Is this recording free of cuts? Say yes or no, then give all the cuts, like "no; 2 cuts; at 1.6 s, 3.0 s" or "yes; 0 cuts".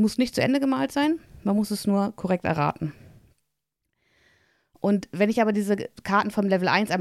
yes; 0 cuts